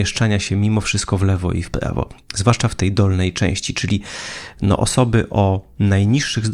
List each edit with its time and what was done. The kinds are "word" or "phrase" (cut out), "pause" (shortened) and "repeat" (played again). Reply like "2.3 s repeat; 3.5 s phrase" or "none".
none